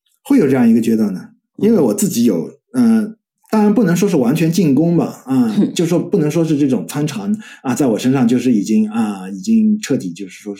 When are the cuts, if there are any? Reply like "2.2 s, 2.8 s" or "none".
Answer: none